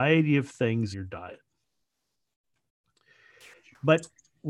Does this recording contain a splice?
yes; 1 cut; at 0.9 s

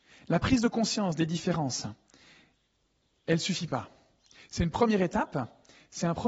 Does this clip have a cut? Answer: no; 0 cuts

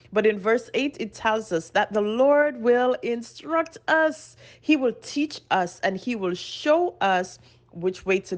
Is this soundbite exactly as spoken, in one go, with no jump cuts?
yes; 0 cuts

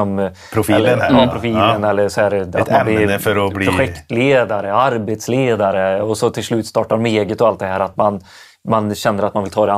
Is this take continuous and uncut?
yes; 0 cuts

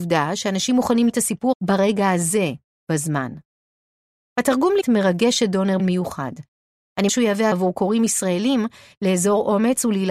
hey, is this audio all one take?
no; 6 cuts; at 1.1 s, 1.5 s, 4.8 s, 5.8 s, 7.1 s, 7.5 s

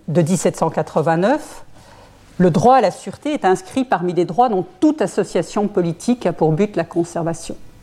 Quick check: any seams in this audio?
no; 0 cuts

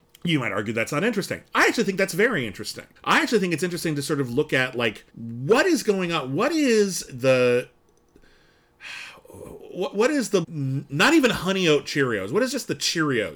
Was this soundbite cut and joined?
yes; 5 cuts; at 3.0 s, 5.1 s, 7.1 s, 9.9 s, 10.4 s

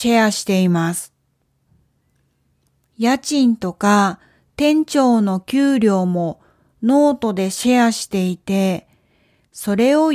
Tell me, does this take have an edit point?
no; 0 cuts

